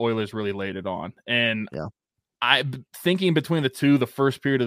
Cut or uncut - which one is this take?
uncut